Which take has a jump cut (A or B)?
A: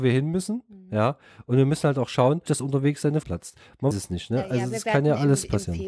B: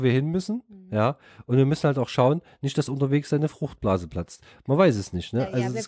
A